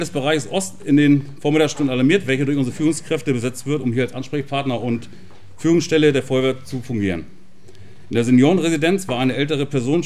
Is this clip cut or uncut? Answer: uncut